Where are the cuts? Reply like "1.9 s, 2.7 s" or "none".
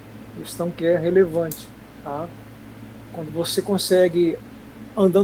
3.3 s